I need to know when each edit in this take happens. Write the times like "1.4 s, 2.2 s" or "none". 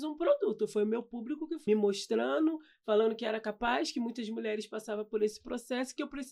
1.7 s